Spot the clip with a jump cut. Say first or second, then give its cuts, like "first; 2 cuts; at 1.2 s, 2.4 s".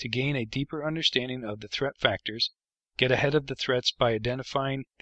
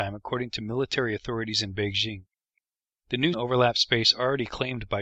second; 1 cut; at 3.3 s